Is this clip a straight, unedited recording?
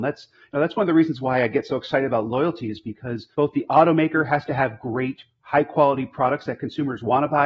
no; 1 cut; at 3.3 s

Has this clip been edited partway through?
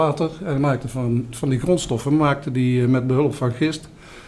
no; 0 cuts

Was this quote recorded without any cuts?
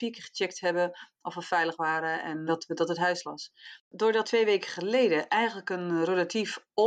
no; 3 cuts; at 2.5 s, 3.2 s, 4.2 s

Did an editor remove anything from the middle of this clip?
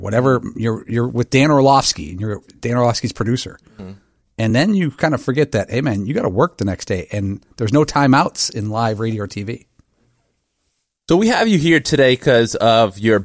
no; 0 cuts

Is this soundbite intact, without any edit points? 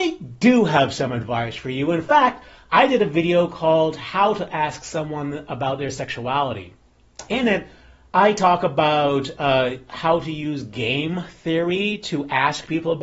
yes; 0 cuts

